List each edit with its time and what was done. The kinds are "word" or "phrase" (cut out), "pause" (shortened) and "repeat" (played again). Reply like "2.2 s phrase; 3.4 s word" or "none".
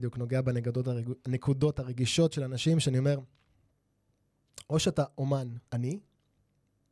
5.7 s pause